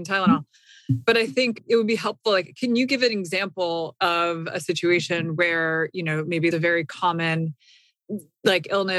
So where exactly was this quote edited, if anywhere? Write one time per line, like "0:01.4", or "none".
0:06.5